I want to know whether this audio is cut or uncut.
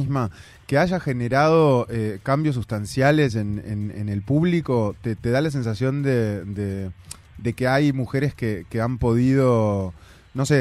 uncut